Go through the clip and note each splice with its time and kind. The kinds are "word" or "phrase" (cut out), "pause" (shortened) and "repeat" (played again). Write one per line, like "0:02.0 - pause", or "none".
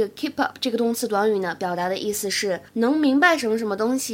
0:02.7 - pause